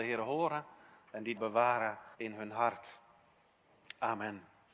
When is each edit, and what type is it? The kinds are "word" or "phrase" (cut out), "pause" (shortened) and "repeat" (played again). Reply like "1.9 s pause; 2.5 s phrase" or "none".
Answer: 1.4 s word; 2.1 s pause